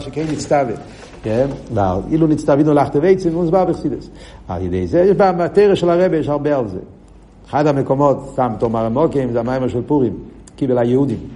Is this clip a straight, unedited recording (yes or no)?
yes